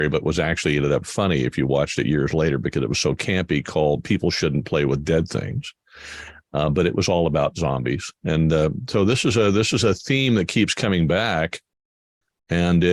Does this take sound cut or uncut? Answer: uncut